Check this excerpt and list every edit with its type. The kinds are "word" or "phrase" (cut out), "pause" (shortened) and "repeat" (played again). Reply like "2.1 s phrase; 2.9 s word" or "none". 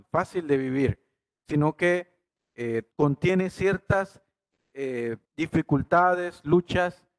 2.9 s pause; 5.2 s pause